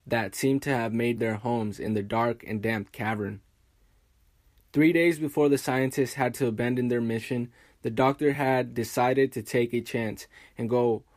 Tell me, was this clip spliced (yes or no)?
no